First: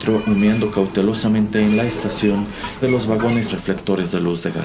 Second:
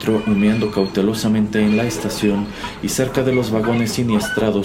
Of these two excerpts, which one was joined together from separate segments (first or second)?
first